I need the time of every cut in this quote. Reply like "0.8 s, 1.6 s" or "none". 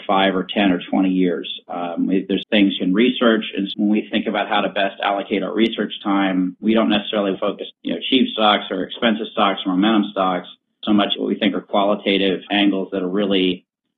2.4 s, 2.8 s, 3.7 s, 6.6 s, 7.3 s, 7.7 s, 10.8 s, 11.1 s, 12.5 s

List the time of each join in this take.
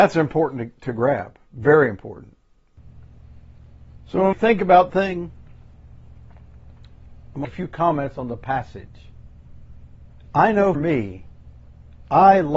4.3 s, 4.9 s, 7.4 s, 10.7 s

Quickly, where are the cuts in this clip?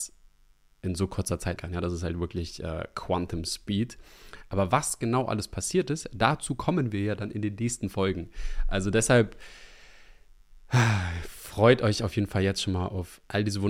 1.6 s

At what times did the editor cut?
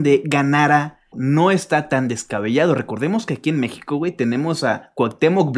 1.1 s

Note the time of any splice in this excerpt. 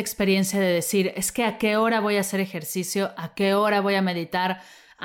none

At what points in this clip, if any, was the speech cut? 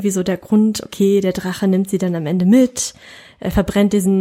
none

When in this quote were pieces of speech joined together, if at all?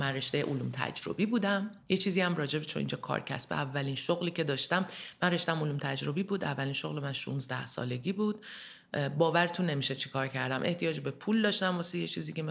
1.8 s

